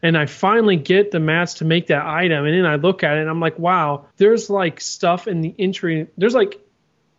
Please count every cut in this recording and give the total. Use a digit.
1